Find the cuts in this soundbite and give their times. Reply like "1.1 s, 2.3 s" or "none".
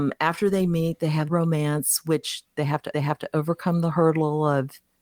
1.3 s, 2.9 s